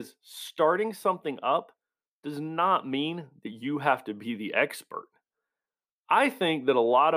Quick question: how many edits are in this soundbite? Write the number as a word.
zero